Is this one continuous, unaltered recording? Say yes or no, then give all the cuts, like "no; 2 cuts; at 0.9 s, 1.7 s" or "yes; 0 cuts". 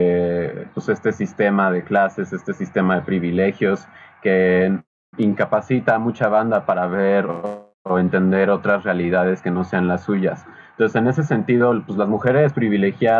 yes; 0 cuts